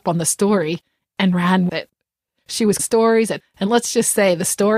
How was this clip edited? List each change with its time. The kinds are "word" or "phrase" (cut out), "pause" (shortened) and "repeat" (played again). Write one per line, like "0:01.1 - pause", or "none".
0:01.7 - word
0:02.8 - phrase
0:03.4 - phrase